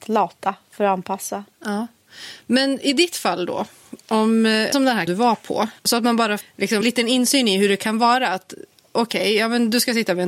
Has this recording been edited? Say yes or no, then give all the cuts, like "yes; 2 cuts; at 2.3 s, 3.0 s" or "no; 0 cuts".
yes; 6 cuts; at 1.5 s, 4.7 s, 5.1 s, 5.8 s, 6.4 s, 6.8 s